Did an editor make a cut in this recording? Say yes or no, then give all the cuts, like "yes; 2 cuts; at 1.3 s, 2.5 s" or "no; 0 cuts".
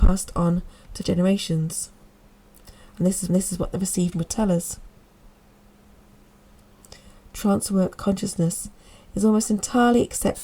yes; 4 cuts; at 1.0 s, 3.3 s, 4.1 s, 8.0 s